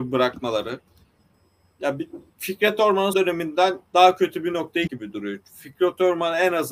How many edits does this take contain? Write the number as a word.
four